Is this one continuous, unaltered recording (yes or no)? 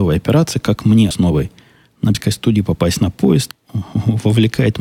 no